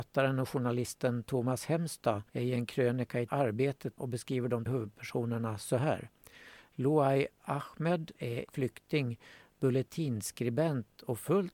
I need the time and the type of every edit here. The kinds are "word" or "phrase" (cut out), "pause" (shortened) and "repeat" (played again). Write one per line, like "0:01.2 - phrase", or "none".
0:02.3 - pause
0:03.3 - word
0:04.0 - phrase
0:04.7 - word
0:08.2 - word
0:08.5 - word